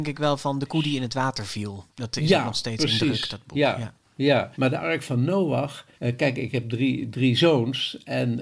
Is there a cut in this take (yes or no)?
yes